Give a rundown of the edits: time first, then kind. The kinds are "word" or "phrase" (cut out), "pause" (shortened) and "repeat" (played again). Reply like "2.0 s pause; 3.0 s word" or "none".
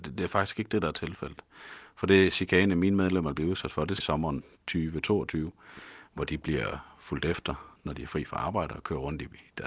4.0 s word